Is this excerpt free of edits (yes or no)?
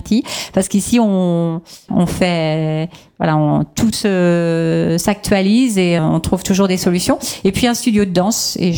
no